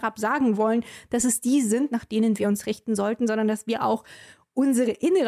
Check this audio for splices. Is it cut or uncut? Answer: uncut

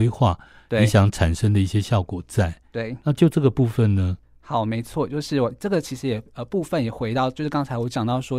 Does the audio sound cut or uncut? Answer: cut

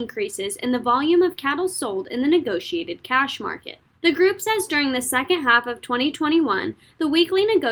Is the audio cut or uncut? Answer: cut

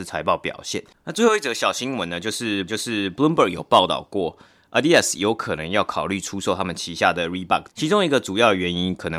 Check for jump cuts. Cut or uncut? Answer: cut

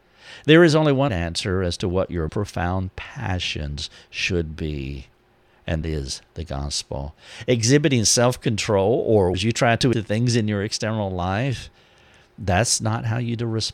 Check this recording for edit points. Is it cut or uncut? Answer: cut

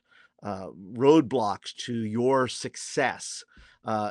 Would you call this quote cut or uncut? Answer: uncut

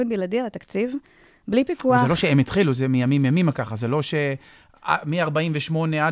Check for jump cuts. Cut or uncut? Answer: uncut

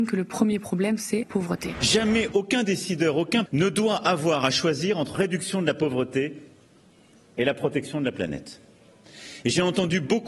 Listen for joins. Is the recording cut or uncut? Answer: cut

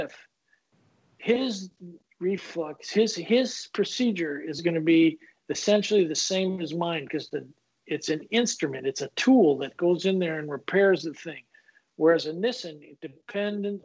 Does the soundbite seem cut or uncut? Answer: uncut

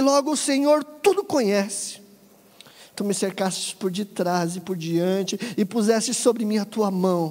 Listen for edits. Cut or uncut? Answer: uncut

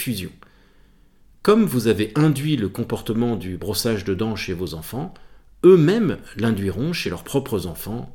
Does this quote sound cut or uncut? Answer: uncut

